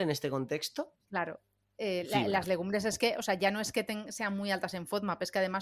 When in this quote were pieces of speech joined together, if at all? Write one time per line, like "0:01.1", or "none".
none